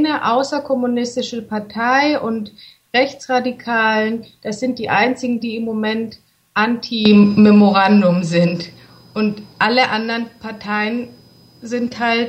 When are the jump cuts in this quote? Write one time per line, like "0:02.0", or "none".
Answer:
none